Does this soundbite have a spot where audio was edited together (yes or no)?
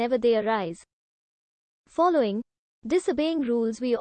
no